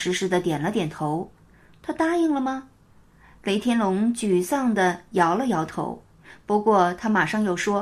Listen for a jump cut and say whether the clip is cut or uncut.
uncut